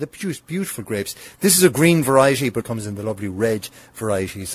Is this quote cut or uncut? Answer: cut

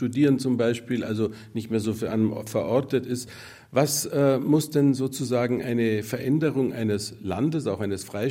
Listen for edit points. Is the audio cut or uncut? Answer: uncut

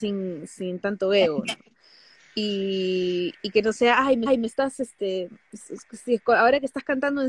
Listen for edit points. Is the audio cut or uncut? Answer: cut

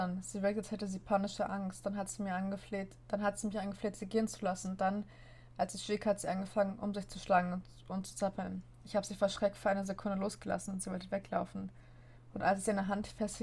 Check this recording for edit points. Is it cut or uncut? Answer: uncut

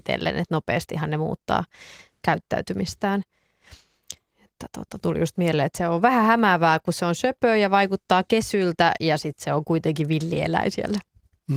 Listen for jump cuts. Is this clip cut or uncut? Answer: uncut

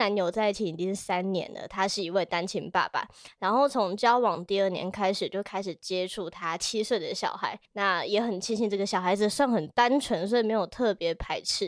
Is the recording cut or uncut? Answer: cut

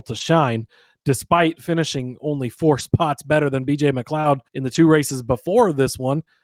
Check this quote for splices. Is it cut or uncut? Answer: cut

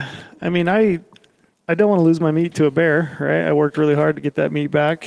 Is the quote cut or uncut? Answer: uncut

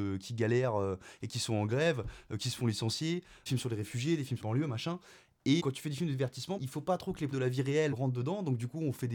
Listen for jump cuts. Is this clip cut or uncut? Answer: cut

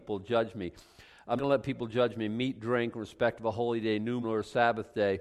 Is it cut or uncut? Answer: cut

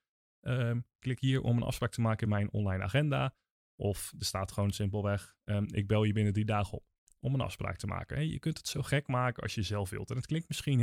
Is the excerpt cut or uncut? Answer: uncut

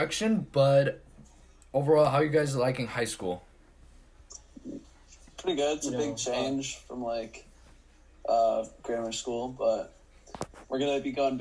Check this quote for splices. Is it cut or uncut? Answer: uncut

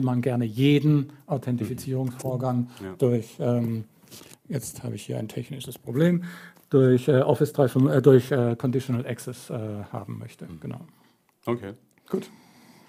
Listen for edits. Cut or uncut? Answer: uncut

